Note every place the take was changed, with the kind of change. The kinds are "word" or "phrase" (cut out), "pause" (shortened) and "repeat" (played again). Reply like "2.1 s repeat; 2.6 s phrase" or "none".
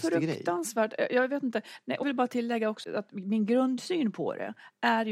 2.0 s word; 2.8 s word